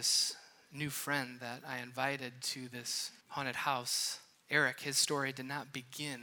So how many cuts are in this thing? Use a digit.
2